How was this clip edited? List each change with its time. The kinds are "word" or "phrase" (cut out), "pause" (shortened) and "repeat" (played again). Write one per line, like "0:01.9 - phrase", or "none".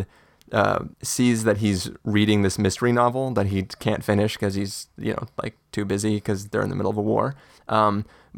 0:00.9 - pause